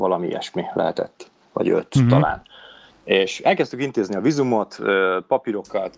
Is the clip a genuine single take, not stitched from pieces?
yes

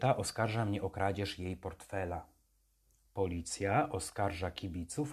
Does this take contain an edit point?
no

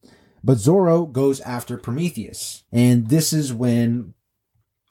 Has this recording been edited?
yes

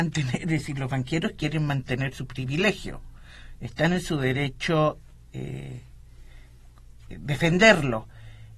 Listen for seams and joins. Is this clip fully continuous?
yes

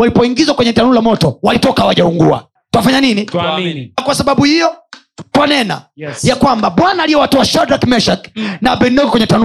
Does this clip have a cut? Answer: yes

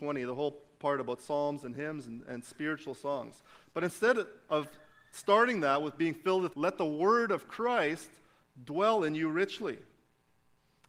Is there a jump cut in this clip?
yes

